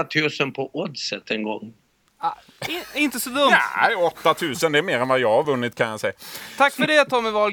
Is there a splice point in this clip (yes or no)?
no